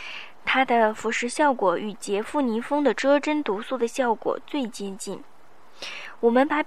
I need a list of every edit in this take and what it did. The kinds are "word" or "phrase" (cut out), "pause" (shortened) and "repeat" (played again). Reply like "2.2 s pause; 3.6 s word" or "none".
none

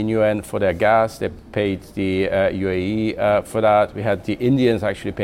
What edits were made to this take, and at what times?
none

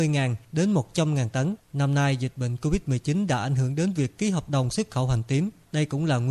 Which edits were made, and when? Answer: none

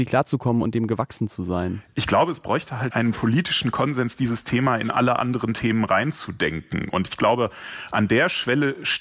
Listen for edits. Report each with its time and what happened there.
2.9 s word

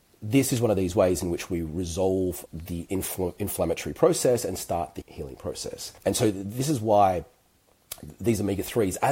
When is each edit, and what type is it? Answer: 6.0 s pause

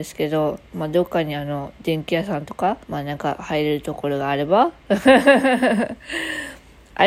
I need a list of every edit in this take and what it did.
2.8 s pause

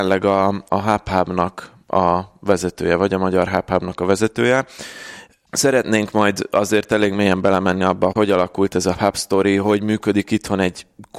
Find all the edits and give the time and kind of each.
8.1 s word; 8.9 s word

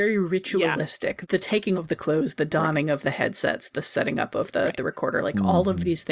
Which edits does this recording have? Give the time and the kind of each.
1.7 s word

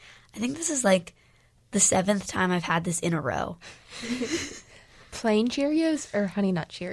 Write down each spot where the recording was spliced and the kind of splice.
none

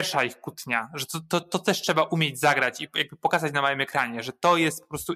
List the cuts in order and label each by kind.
none

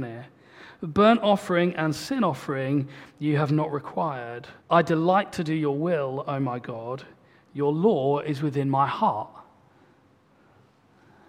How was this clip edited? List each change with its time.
4.6 s pause

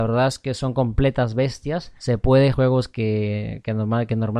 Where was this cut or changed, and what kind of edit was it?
2.5 s phrase

